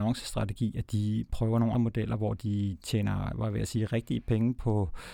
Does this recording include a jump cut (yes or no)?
yes